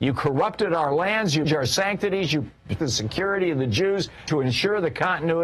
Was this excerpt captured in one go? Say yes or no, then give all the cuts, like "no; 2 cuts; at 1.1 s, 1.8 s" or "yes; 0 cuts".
no; 3 cuts; at 1.4 s, 2.8 s, 4.3 s